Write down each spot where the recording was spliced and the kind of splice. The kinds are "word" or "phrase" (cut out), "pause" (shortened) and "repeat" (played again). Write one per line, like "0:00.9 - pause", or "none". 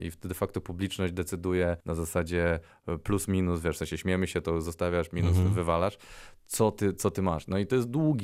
0:01.8 - pause